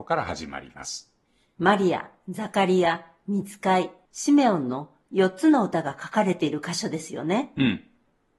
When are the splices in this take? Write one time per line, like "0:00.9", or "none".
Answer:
none

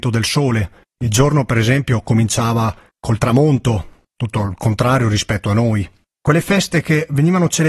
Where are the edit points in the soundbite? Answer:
none

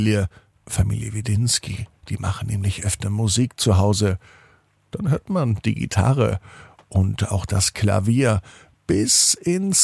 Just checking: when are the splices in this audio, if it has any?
none

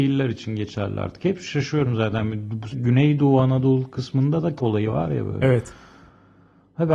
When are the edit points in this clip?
0:02.7
0:04.6

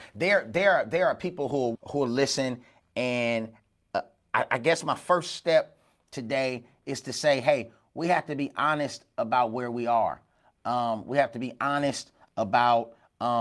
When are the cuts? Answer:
0:01.7

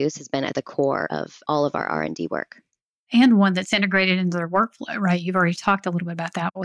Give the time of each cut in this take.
none

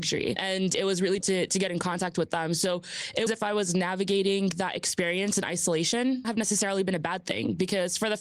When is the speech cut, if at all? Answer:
0:01.2
0:03.3
0:06.2

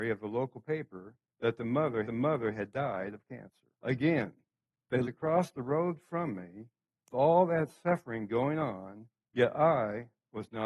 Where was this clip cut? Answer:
0:01.2
0:02.0
0:03.7
0:05.0
0:07.1
0:09.2

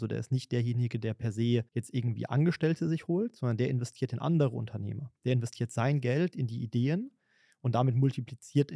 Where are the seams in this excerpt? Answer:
0:01.7

